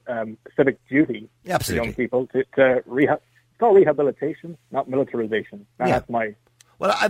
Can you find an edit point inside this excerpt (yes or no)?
no